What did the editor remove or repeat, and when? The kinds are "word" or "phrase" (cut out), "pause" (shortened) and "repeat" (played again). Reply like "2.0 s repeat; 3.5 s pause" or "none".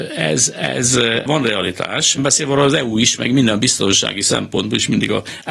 1.3 s word; 2.2 s word